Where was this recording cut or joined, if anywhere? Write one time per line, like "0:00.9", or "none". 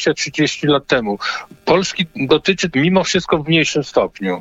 0:02.7

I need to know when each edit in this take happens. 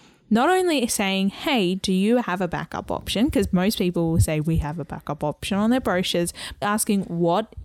0:06.6

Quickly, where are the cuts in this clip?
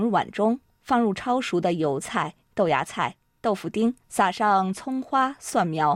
0:04.0

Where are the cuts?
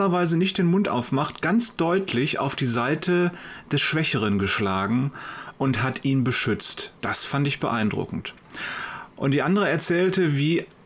0:07.0

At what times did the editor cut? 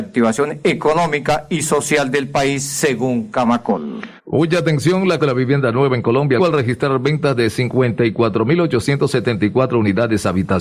0:04.2
0:05.2
0:06.4

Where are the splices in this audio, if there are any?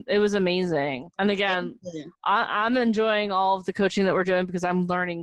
0:01.1
0:02.1

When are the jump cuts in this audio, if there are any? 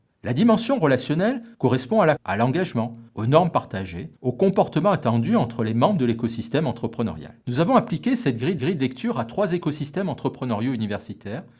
0:01.5
0:02.2
0:03.1
0:04.2
0:07.4
0:08.6

